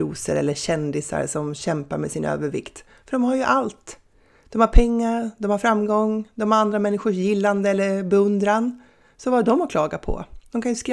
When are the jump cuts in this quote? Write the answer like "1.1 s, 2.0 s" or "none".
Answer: none